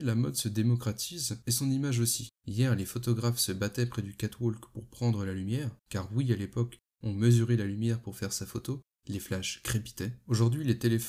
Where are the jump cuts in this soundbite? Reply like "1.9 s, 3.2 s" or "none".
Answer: 2.4 s, 5.8 s